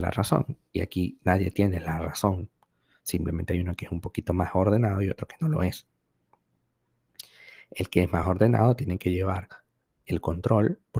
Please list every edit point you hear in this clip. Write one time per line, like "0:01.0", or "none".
none